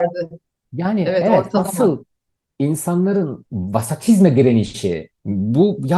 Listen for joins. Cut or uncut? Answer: uncut